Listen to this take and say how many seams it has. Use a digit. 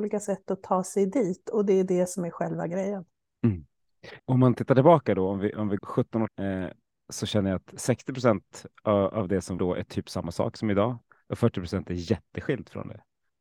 4